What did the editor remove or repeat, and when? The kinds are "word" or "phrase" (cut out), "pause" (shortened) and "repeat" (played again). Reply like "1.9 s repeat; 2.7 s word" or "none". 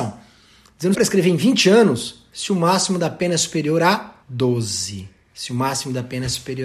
0.9 s phrase; 4.2 s pause